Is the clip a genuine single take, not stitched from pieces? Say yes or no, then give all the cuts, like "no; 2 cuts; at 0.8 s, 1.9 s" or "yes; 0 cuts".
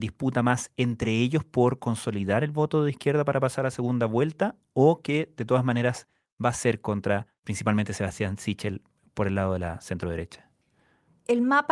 yes; 0 cuts